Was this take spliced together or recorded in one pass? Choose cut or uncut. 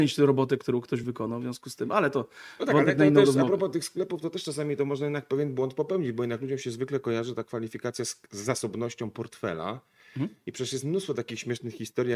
uncut